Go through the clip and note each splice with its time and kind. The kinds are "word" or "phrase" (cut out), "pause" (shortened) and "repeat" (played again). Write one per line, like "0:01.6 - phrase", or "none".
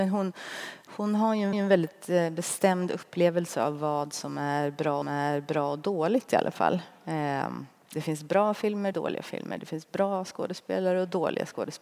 0:01.5 - repeat
0:05.0 - repeat
0:08.9 - phrase

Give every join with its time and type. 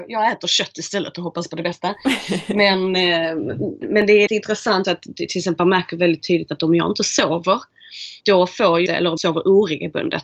0:03.8 - word
0:04.3 - word
0:04.8 - word
0:05.6 - word
0:08.2 - pause
0:08.9 - word
0:09.2 - word

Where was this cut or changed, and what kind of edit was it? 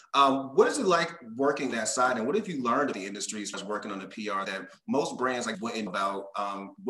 0:01.7 - word
0:02.9 - word
0:03.5 - word
0:04.4 - word
0:05.5 - word
0:05.9 - word

